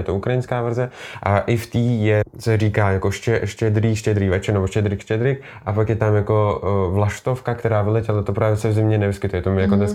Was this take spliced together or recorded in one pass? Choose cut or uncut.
uncut